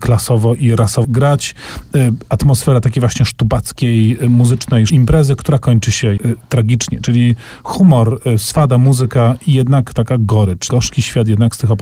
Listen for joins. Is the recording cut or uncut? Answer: cut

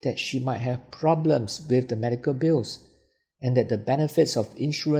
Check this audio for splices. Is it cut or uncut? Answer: uncut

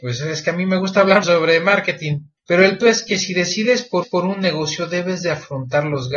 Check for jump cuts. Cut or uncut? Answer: cut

